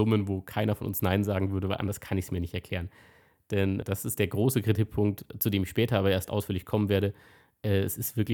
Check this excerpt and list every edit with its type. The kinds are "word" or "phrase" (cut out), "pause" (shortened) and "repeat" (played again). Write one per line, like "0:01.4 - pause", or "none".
0:03.8 - word